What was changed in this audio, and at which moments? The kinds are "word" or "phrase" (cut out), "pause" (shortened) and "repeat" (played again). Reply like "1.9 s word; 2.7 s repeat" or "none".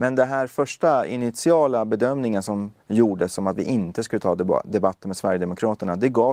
2.8 s pause